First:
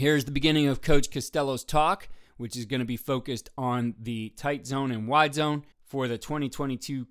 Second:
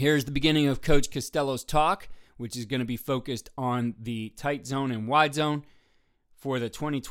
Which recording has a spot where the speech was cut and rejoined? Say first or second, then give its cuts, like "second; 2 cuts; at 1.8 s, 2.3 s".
first; 1 cut; at 5.7 s